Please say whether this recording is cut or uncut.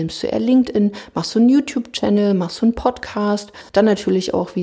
cut